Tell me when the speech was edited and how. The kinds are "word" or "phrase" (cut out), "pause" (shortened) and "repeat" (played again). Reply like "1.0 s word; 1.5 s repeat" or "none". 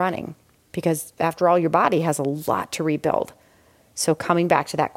none